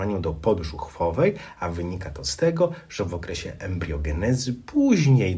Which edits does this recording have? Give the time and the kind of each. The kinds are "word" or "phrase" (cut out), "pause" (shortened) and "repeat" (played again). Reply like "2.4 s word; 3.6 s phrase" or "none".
none